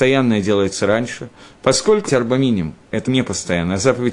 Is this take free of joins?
no; 2 cuts; at 2.1 s, 3.0 s

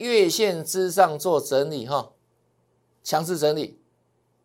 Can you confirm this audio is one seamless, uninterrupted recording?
yes; 0 cuts

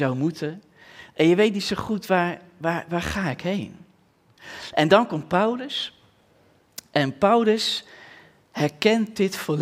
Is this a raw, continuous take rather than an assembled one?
yes; 0 cuts

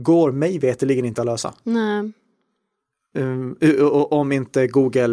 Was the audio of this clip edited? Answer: no; 0 cuts

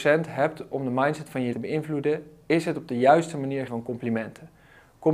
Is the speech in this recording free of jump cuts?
no; 2 cuts; at 1.5 s, 3.7 s

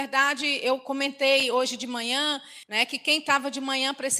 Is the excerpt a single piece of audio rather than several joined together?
no; 1 cut; at 2.6 s

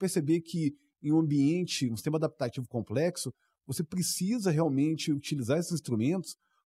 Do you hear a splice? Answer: no; 0 cuts

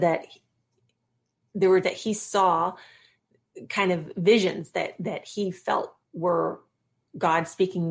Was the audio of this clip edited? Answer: yes; 2 cuts; at 1.8 s, 6.1 s

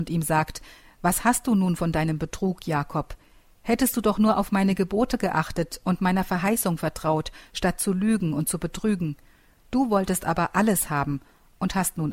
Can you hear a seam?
no; 0 cuts

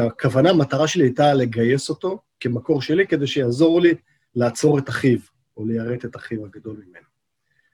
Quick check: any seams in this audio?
no; 0 cuts

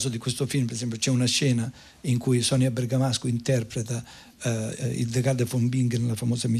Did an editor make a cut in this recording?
no; 0 cuts

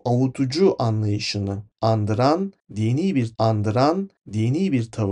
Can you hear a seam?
yes; 1 cut; at 3.3 s

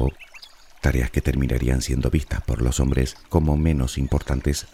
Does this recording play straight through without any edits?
yes; 0 cuts

